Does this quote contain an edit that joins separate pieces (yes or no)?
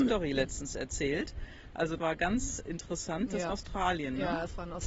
yes